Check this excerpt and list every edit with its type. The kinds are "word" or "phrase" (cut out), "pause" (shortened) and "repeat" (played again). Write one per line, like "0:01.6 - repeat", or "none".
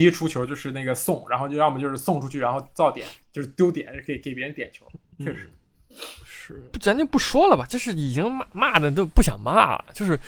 0:03.2 - pause
0:06.7 - phrase